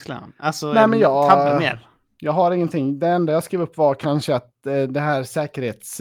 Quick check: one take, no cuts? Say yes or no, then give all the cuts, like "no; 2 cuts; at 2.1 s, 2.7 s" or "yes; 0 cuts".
yes; 0 cuts